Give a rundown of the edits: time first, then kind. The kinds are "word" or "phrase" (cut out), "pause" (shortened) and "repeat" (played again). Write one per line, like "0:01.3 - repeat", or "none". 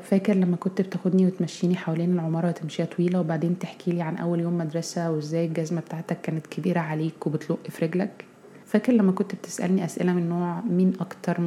0:08.6 - pause